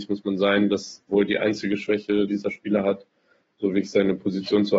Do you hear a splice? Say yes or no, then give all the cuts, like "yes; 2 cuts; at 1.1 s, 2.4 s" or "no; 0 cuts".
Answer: yes; 3 cuts; at 1.1 s, 2.3 s, 3.5 s